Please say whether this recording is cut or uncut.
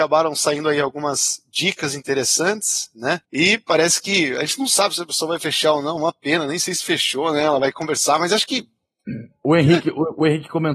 cut